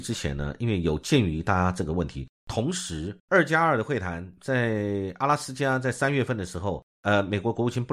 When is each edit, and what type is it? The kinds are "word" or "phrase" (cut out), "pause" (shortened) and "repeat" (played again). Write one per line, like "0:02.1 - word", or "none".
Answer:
0:03.2 - pause